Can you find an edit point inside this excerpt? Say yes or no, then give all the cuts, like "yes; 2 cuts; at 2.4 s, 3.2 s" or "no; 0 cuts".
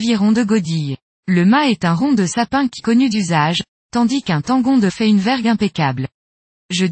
yes; 3 cuts; at 2.8 s, 3.1 s, 4.9 s